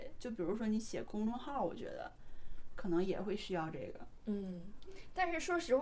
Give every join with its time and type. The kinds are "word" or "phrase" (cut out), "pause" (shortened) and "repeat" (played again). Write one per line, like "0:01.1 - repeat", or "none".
none